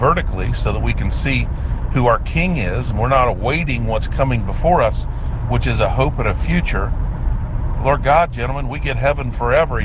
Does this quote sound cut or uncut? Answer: uncut